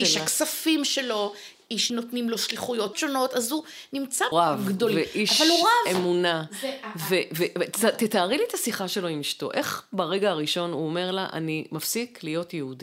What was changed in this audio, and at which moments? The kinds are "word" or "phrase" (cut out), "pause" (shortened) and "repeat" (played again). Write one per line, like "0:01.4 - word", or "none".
0:01.9 - word
0:02.9 - word
0:04.3 - phrase